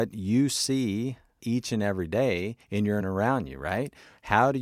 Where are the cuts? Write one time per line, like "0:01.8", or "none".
0:01.4
0:02.6
0:03.0